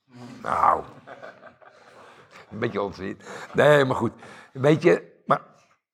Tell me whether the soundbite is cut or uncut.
uncut